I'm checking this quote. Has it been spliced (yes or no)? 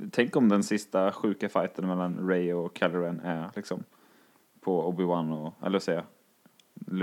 no